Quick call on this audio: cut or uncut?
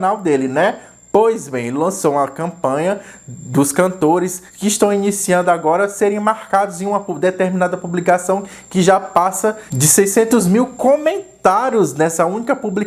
cut